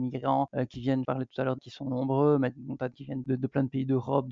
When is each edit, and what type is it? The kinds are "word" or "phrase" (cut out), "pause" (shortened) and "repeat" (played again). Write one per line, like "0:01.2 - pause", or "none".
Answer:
0:01.0 - word
0:01.6 - word
0:02.9 - word
0:03.2 - word